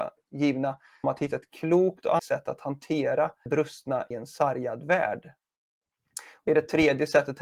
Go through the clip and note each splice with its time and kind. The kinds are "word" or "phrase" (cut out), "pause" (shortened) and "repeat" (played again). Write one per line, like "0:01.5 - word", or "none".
0:01.0 - word
0:02.2 - word
0:03.5 - word
0:04.1 - word
0:06.5 - word